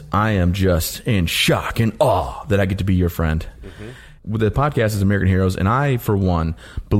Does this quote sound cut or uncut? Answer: uncut